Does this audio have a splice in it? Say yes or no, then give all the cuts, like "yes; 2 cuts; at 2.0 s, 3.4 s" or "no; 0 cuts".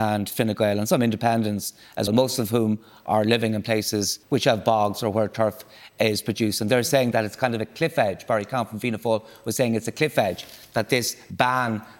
yes; 2 cuts; at 2.1 s, 4.2 s